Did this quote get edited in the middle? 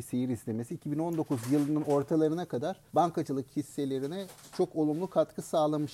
yes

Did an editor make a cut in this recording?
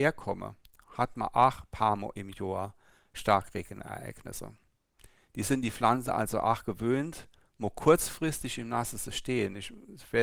no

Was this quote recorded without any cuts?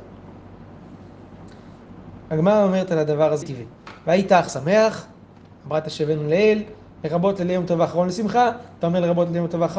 no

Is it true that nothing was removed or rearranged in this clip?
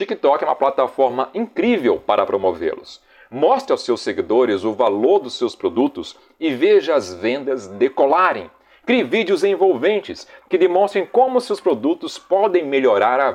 yes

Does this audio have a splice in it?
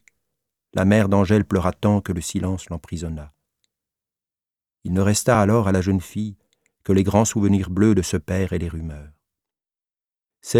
no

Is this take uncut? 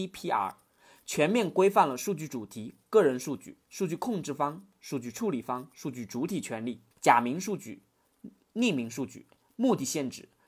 no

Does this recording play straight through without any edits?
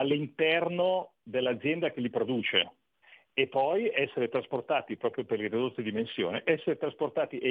yes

